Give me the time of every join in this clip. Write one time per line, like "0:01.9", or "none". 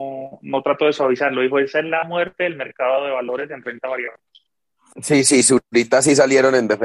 none